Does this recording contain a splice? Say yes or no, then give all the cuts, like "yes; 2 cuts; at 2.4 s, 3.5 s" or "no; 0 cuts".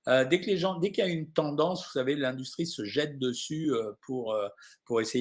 no; 0 cuts